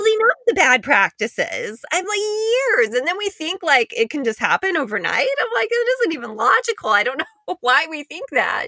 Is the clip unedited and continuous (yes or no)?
yes